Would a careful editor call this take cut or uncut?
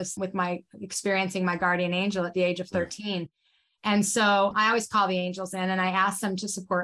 uncut